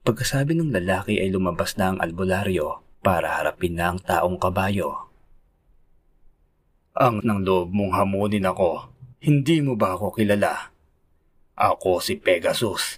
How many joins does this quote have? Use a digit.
3